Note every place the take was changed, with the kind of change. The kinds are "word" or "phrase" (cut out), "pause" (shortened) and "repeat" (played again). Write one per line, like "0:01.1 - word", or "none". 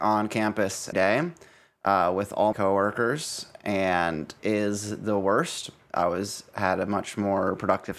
0:00.9 - word
0:02.5 - word
0:04.4 - word